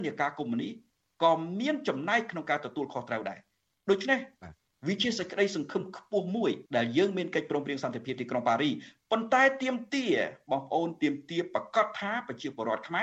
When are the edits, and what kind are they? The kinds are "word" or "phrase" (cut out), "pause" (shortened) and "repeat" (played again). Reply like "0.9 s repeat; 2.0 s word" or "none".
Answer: 6.7 s pause